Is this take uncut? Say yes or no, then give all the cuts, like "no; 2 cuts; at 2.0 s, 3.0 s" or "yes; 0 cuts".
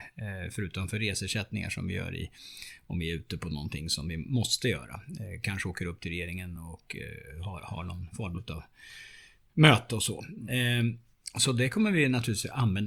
yes; 0 cuts